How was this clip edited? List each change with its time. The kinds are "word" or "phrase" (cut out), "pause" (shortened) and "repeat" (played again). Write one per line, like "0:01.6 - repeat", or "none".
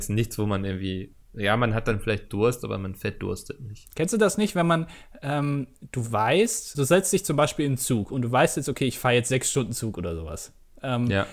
0:01.2 - pause
0:06.7 - word